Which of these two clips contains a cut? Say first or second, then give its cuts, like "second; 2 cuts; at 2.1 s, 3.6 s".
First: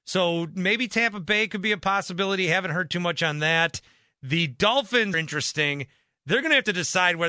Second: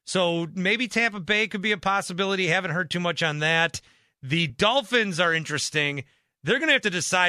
first; 1 cut; at 5.1 s